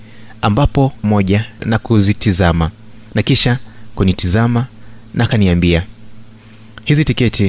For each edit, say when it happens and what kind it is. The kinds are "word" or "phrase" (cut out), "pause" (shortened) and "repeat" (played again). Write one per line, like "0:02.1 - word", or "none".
0:01.0 - word
0:03.1 - pause